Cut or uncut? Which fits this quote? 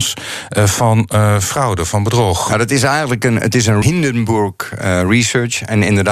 cut